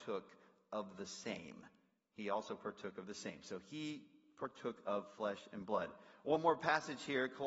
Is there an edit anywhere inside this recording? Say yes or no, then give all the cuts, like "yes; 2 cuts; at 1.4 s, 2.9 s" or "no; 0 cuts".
no; 0 cuts